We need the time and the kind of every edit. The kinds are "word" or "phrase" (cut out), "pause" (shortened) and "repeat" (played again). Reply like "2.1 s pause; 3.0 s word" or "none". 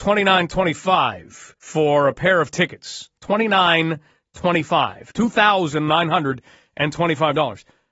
1.6 s pause